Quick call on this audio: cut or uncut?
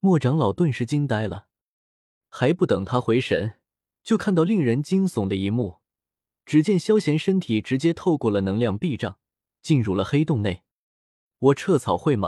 uncut